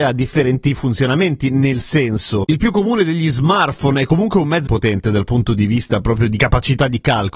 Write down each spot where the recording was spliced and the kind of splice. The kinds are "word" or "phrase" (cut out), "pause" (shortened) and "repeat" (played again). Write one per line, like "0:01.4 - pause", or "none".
0:04.7 - word